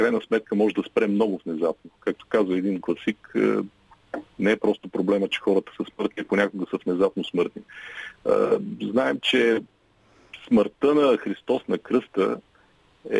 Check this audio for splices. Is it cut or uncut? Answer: uncut